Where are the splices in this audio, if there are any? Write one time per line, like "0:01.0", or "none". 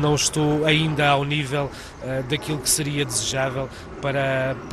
none